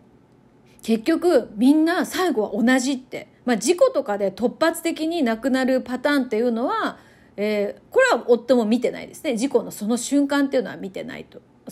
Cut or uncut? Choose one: cut